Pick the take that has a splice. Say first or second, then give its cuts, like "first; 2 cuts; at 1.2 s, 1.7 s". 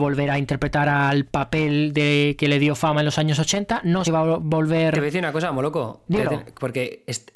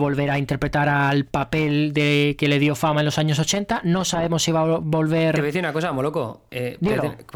first; 2 cuts; at 4.0 s, 6.1 s